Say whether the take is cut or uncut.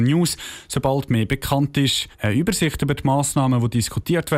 cut